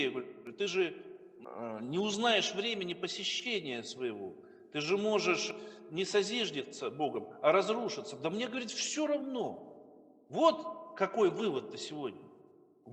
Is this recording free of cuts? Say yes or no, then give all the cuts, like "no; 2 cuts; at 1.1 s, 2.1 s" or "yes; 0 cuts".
yes; 0 cuts